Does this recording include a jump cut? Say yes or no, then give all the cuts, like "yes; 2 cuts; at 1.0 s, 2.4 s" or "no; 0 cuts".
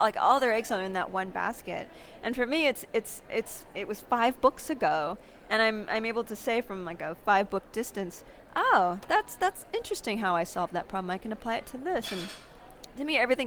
no; 0 cuts